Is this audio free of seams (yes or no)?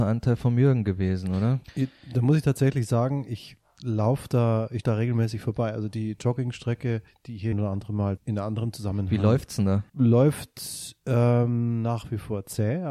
no